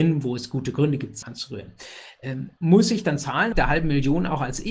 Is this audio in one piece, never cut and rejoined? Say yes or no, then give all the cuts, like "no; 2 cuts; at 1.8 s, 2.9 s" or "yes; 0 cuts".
no; 3 cuts; at 1.2 s, 2.6 s, 3.5 s